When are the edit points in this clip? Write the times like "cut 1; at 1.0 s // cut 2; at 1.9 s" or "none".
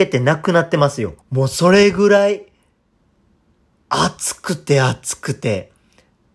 cut 1; at 1.2 s

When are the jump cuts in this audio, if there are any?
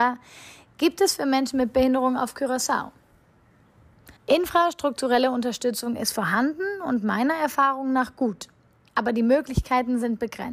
cut 1; at 4.2 s

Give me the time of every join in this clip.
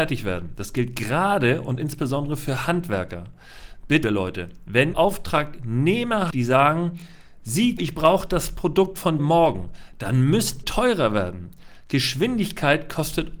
cut 1; at 4.0 s // cut 2; at 4.9 s // cut 3; at 6.3 s // cut 4; at 7.8 s // cut 5; at 9.2 s // cut 6; at 10.6 s

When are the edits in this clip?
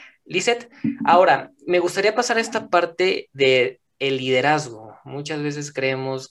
none

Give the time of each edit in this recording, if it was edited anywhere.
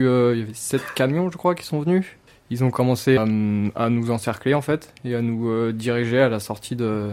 cut 1; at 2.3 s // cut 2; at 3.2 s

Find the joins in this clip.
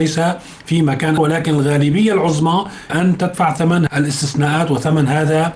cut 1; at 1.2 s // cut 2; at 2.9 s // cut 3; at 3.9 s

